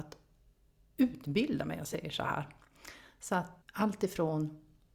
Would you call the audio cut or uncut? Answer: cut